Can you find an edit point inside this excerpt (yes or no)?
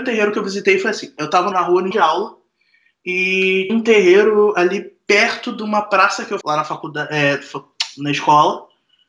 yes